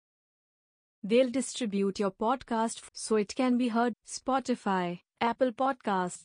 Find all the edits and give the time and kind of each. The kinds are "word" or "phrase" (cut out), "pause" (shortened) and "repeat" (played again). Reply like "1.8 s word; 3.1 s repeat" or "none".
2.9 s word; 3.9 s word